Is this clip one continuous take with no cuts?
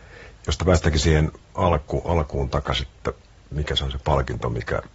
yes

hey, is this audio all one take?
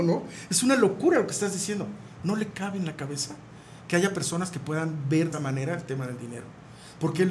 no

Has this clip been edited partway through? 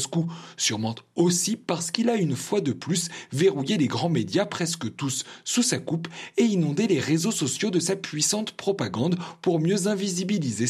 no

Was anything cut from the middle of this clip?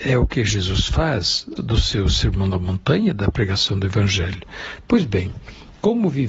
yes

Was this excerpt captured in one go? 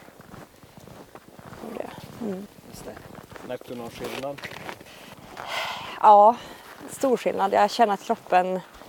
yes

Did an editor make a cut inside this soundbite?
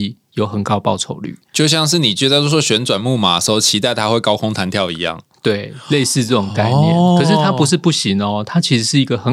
no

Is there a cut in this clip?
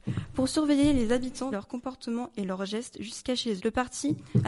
yes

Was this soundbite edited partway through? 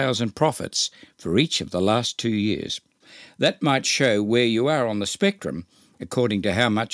no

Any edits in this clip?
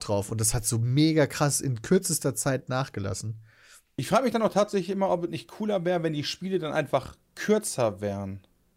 no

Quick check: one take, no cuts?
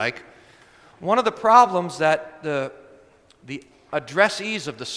yes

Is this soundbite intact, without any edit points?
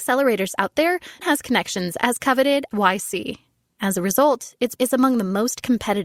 no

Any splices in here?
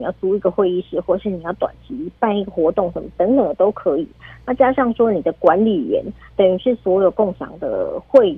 no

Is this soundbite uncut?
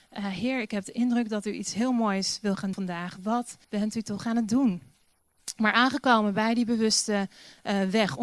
no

